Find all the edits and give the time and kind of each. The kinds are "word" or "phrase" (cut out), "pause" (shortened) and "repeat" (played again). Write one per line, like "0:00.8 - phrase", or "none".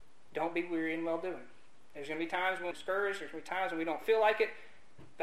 0:02.7 - word

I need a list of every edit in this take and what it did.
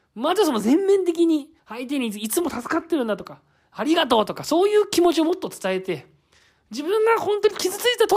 0:01.6 - pause

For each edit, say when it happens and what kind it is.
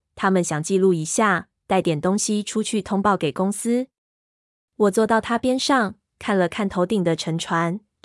none

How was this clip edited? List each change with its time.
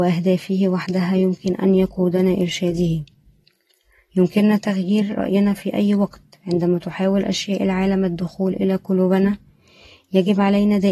none

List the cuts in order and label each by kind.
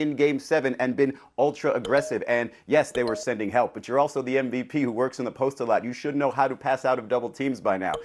none

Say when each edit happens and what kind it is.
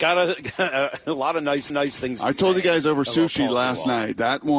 0:01.7 - repeat

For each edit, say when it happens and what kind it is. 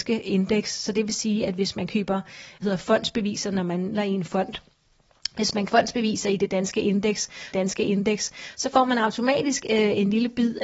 0:02.6 - word
0:03.9 - phrase
0:05.7 - word
0:07.5 - repeat

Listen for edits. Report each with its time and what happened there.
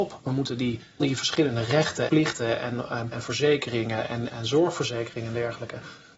0:01.0 - word
0:02.1 - word
0:03.1 - word
0:04.3 - word

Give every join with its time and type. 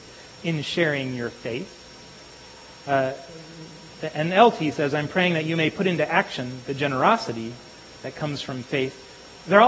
none

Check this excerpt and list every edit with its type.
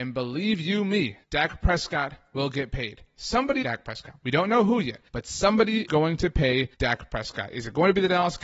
0:01.2 - pause
0:03.6 - phrase
0:05.1 - pause
0:05.9 - word
0:06.7 - pause

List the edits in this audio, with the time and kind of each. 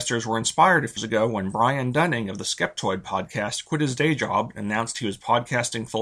0:01.0 - word

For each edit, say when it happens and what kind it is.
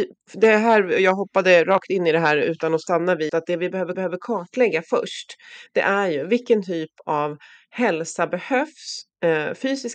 0:03.3 - word
0:03.9 - repeat

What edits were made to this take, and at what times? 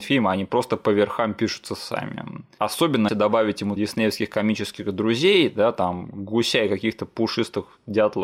0:03.1 - word
0:03.8 - phrase

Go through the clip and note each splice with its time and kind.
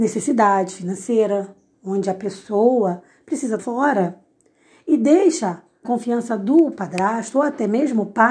0:03.6 - word
0:05.8 - word

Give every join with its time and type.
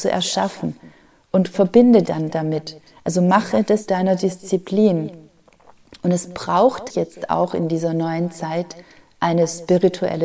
0:02.0 - word
0:03.9 - word
0:06.9 - word

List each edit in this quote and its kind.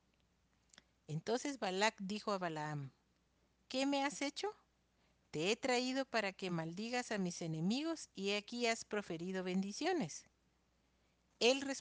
none

